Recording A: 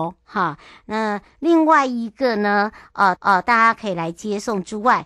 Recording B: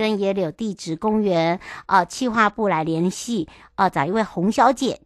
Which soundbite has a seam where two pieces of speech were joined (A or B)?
A